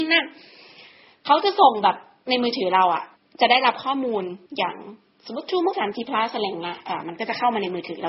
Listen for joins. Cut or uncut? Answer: cut